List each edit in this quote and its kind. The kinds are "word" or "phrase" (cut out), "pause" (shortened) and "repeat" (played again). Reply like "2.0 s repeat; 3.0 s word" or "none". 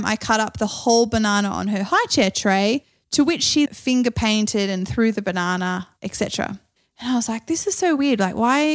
3.7 s word